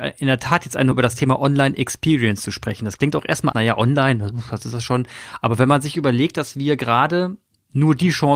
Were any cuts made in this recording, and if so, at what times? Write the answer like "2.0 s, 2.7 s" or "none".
0.9 s, 3.5 s